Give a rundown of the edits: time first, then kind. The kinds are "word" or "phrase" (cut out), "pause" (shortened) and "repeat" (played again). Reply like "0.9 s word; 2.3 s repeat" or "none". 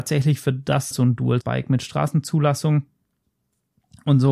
0.9 s word; 1.4 s word